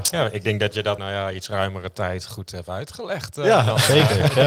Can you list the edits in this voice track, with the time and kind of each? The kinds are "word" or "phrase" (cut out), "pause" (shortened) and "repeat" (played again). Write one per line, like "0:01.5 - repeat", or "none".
0:01.0 - phrase